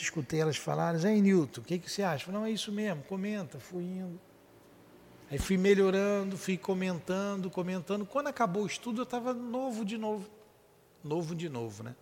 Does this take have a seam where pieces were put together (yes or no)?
no